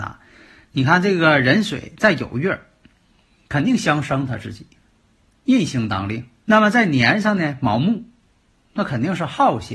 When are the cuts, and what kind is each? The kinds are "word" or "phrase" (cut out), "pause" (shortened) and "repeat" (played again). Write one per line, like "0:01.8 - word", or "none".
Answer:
0:06.4 - pause